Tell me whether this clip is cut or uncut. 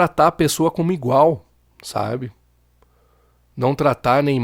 uncut